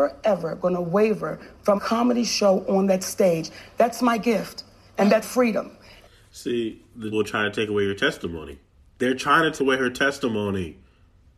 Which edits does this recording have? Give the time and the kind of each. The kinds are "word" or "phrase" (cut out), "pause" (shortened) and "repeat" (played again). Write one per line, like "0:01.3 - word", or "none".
0:01.8 - word
0:05.2 - word
0:07.1 - word
0:09.6 - word